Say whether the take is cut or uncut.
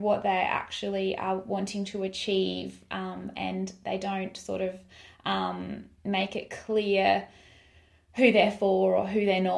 uncut